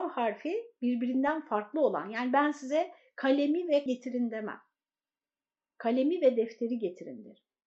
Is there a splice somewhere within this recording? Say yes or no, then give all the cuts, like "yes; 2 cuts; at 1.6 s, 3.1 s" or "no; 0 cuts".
yes; 1 cut; at 3.9 s